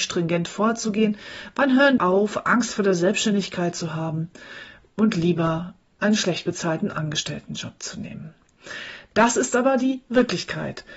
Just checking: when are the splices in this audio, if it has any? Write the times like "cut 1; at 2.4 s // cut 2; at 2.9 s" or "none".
cut 1; at 2.0 s